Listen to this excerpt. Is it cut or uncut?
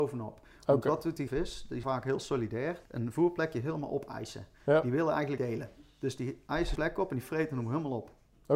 cut